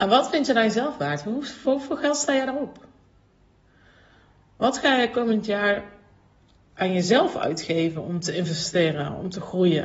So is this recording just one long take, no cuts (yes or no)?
yes